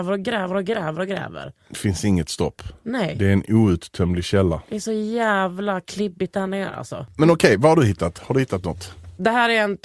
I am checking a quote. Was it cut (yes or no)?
no